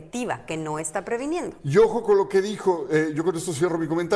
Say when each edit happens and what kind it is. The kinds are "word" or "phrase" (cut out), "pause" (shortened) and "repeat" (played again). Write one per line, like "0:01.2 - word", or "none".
none